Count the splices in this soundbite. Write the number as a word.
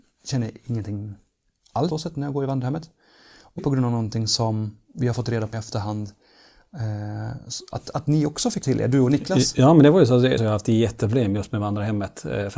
five